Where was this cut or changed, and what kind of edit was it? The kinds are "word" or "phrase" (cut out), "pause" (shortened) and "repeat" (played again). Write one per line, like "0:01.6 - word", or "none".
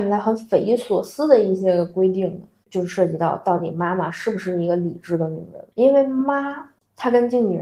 0:05.7 - pause